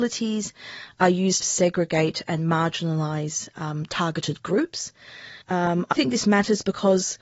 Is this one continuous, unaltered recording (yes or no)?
no